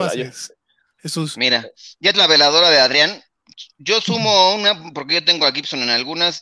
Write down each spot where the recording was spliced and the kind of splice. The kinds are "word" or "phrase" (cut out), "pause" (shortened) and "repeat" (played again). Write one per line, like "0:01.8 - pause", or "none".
0:02.1 - word